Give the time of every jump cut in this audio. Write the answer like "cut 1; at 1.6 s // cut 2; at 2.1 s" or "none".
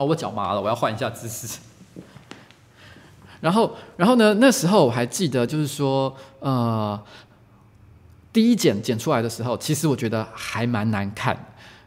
none